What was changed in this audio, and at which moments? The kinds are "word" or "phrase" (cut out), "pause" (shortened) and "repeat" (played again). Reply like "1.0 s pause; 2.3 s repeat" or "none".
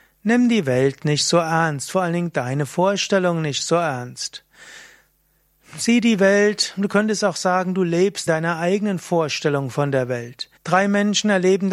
8.3 s word; 10.6 s pause